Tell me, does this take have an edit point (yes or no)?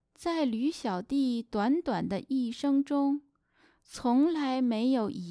no